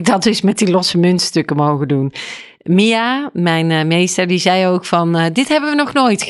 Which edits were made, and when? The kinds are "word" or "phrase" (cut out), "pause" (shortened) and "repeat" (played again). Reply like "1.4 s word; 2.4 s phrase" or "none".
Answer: none